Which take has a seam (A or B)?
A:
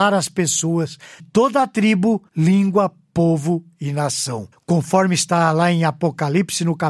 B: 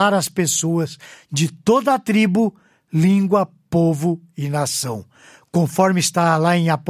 A